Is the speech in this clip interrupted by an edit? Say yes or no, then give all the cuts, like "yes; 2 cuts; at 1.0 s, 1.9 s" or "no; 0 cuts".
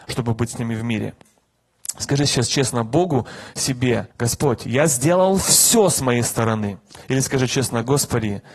yes; 2 cuts; at 4.1 s, 7.0 s